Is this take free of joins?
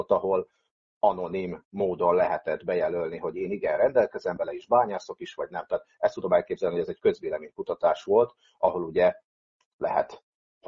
yes; 0 cuts

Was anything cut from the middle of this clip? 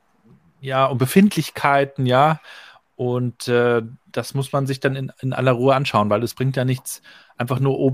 no; 0 cuts

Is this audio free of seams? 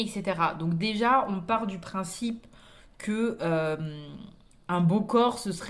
yes; 0 cuts

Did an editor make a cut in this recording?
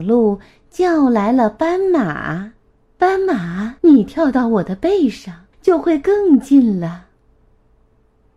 yes; 3 cuts; at 2.7 s, 3.8 s, 5.5 s

